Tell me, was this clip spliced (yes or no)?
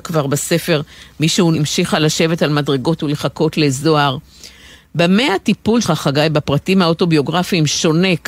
yes